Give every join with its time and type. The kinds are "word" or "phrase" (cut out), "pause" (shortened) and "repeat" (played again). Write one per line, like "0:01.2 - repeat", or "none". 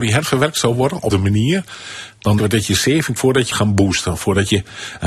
0:01.1 - word
0:02.4 - word
0:03.2 - word
0:03.5 - word